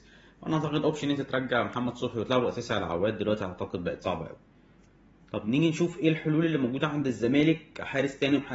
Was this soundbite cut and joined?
no; 0 cuts

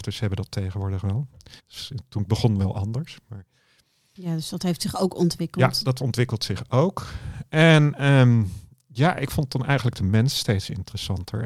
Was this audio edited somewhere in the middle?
yes; 1 cut; at 1.6 s

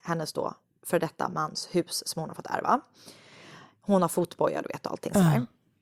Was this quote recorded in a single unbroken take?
yes; 0 cuts

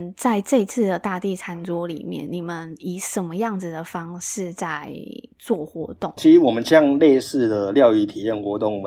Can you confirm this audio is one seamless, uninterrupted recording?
yes; 0 cuts

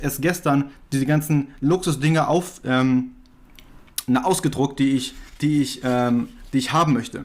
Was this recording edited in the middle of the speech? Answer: no; 0 cuts

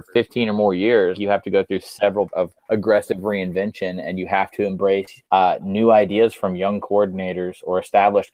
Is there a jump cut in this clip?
yes; 4 cuts; at 1.1 s, 2.3 s, 2.6 s, 5.3 s

